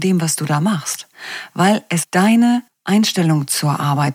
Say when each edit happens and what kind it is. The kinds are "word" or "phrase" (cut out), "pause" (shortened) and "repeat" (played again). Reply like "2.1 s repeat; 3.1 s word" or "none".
2.0 s word; 2.7 s pause